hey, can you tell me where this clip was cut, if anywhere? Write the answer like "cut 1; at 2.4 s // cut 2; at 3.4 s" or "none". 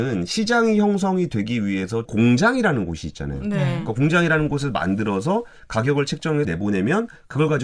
cut 1; at 2.1 s // cut 2; at 6.4 s

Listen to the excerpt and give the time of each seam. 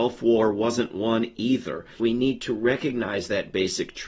cut 1; at 2.0 s

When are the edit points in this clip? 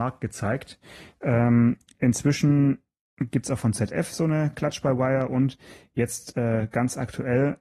none

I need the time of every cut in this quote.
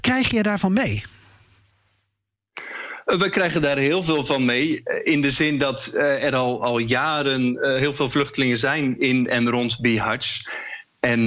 none

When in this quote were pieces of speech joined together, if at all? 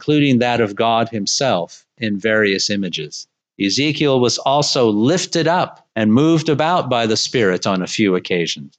cut 1; at 3.4 s // cut 2; at 5.9 s

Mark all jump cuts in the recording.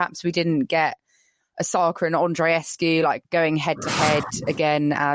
none

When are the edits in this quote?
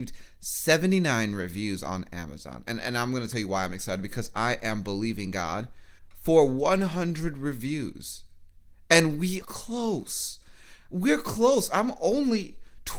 cut 1; at 6.0 s // cut 2; at 9.4 s

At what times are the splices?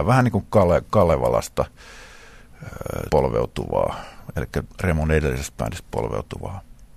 cut 1; at 3.1 s

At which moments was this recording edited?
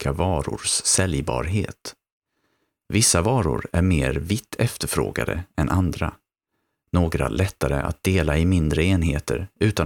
none

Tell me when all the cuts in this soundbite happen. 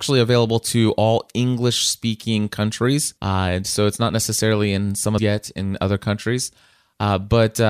cut 1; at 3.2 s // cut 2; at 5.2 s

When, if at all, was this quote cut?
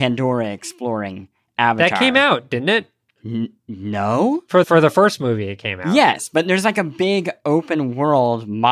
cut 1; at 3.6 s // cut 2; at 4.6 s

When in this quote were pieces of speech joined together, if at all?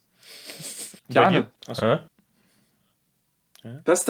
cut 1; at 1.0 s // cut 2; at 1.6 s

